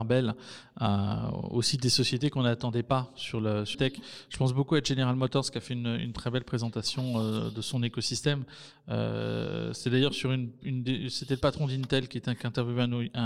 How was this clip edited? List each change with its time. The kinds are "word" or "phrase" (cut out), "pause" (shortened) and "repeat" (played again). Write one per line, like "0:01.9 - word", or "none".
0:03.7 - word